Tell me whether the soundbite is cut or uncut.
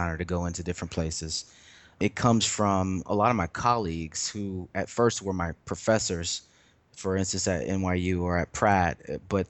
uncut